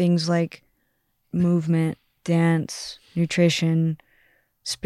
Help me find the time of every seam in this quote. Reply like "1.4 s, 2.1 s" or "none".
1.2 s, 3.1 s